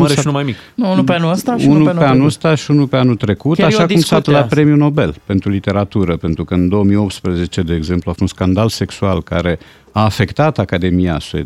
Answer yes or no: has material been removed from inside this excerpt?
yes